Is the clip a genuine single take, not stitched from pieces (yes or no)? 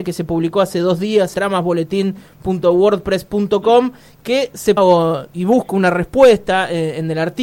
no